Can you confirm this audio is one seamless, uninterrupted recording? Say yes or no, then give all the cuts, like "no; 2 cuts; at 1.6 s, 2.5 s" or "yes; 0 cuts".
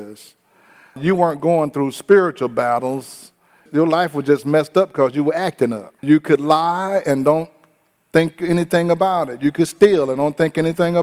no; 1 cut; at 6.0 s